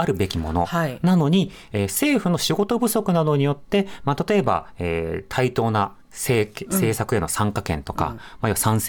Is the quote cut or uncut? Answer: cut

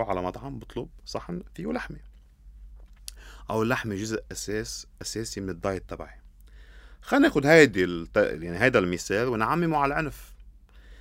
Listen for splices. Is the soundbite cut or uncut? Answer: uncut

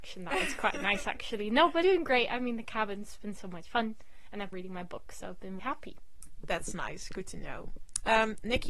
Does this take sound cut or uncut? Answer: cut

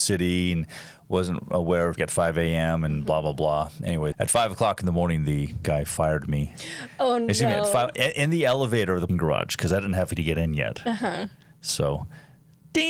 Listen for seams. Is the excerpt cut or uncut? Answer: cut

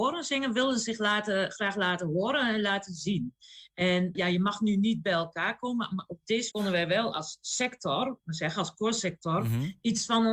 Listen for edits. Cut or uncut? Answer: cut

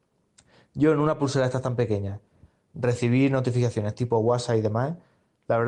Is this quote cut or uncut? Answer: uncut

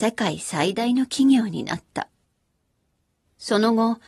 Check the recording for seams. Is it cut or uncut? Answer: uncut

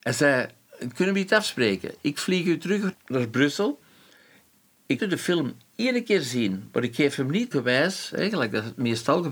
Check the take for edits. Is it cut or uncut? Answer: cut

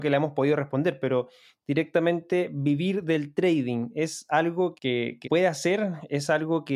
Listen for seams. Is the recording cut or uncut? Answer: cut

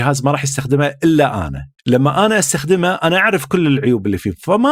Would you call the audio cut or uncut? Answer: cut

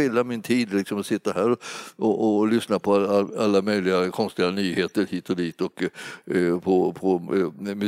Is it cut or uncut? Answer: uncut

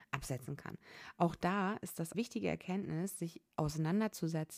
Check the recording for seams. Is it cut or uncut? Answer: cut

